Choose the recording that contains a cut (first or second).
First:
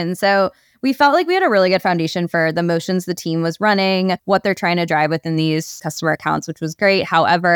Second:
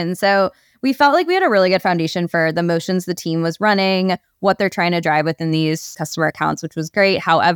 first